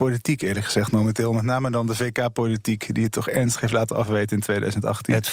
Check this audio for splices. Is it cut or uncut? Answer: uncut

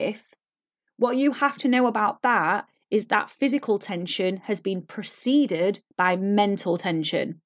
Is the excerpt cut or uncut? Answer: cut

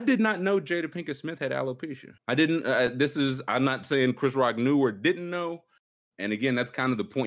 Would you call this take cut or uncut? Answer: cut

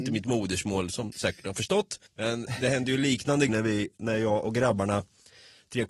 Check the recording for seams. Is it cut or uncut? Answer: cut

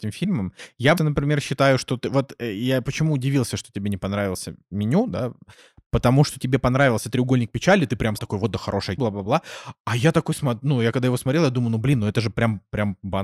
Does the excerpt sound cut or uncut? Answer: cut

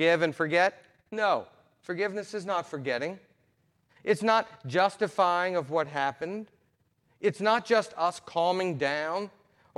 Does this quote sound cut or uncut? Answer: uncut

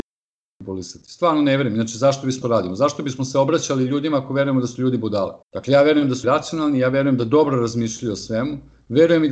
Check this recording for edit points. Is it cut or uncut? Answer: cut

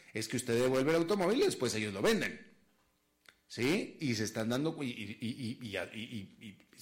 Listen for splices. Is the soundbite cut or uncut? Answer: uncut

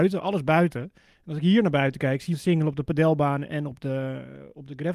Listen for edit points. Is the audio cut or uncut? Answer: cut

